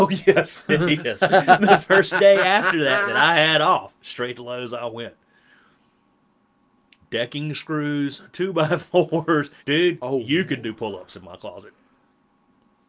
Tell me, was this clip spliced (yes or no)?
yes